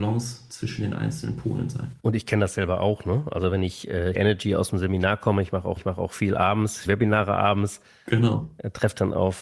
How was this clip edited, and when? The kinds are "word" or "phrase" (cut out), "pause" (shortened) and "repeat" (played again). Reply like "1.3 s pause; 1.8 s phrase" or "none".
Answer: 2.0 s pause; 4.1 s phrase; 5.8 s repeat; 6.9 s word